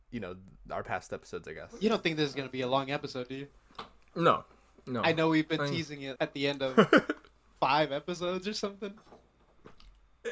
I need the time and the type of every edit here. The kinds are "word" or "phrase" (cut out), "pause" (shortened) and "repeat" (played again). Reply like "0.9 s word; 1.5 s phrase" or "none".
6.2 s word; 7.5 s word